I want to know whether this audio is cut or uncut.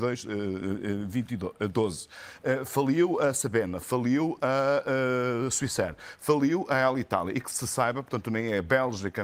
uncut